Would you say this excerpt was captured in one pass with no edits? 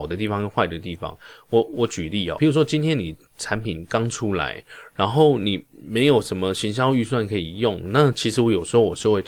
no; 1 cut; at 2.4 s

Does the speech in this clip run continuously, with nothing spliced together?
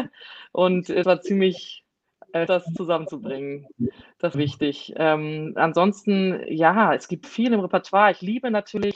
no; 4 cuts; at 1.0 s, 2.5 s, 4.3 s, 7.2 s

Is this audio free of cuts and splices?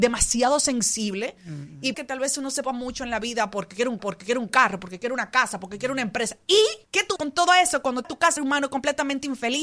no; 7 cuts; at 1.9 s, 2.6 s, 4.0 s, 6.9 s, 7.2 s, 8.0 s, 8.4 s

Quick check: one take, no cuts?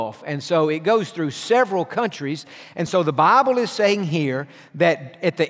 yes; 0 cuts

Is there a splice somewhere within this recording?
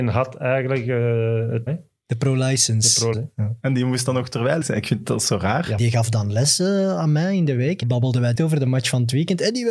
yes; 6 cuts; at 1.7 s, 3.1 s, 4.6 s, 5.8 s, 7.8 s, 8.3 s

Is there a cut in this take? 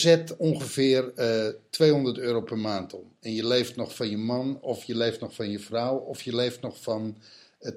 no; 0 cuts

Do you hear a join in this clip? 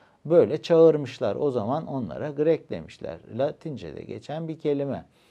no; 0 cuts

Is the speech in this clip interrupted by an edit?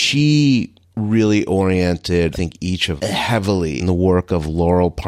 yes; 3 cuts; at 2.3 s, 3.0 s, 3.8 s

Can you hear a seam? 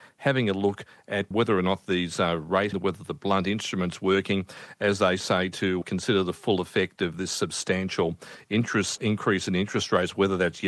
yes; 4 cuts; at 1.3 s, 2.7 s, 5.8 s, 9.0 s

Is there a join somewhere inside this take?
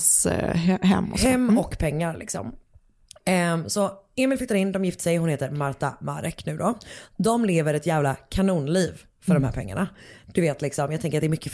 no; 0 cuts

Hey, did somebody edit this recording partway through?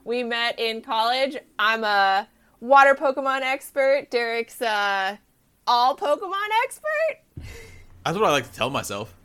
no; 0 cuts

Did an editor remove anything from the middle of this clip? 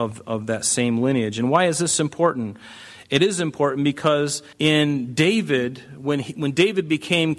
yes; 1 cut; at 4.5 s

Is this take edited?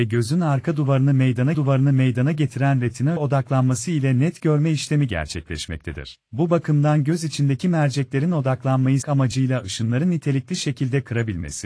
yes; 4 cuts; at 1.5 s, 3.2 s, 6.2 s, 9.0 s

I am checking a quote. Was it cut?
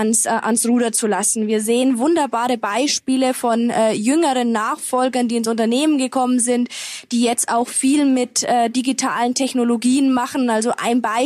no; 0 cuts

